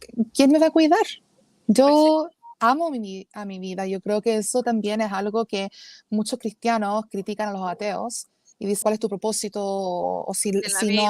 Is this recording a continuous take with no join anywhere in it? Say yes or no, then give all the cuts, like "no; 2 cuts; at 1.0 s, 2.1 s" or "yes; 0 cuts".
no; 1 cut; at 8.8 s